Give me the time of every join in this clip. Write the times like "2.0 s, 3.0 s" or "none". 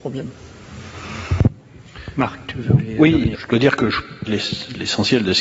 3.3 s, 4.3 s